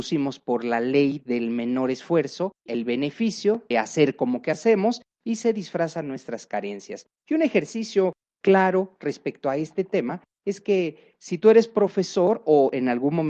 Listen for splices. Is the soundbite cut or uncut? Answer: cut